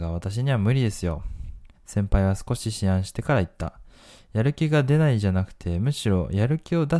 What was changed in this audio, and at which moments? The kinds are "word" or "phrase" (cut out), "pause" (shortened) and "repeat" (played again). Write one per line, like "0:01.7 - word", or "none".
0:01.7 - pause